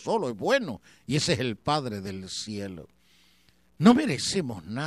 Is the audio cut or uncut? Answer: uncut